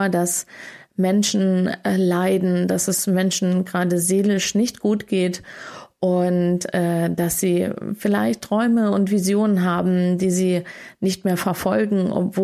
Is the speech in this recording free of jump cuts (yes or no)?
yes